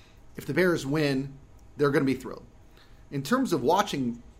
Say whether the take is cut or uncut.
uncut